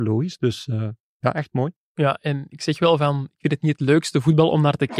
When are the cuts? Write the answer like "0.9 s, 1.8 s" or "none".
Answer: none